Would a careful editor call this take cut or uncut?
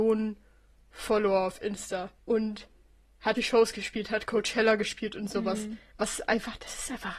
cut